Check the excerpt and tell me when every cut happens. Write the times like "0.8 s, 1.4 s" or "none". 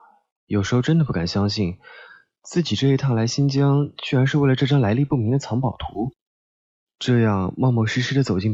none